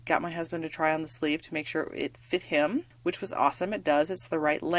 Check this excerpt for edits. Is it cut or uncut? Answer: uncut